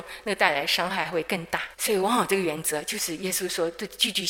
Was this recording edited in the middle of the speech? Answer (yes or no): yes